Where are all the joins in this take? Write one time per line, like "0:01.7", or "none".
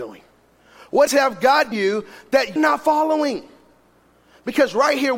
0:01.1
0:01.7
0:02.6